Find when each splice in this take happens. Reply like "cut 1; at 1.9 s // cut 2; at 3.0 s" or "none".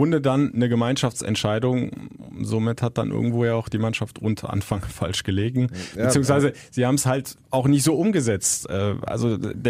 cut 1; at 7.4 s